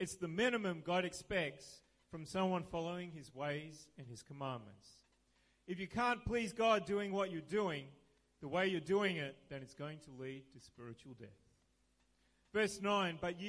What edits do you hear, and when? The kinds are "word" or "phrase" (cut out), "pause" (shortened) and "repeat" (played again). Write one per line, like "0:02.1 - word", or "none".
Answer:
none